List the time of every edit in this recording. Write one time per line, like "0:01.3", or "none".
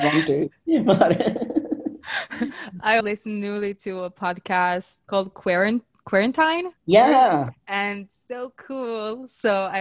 0:03.0
0:05.0
0:06.8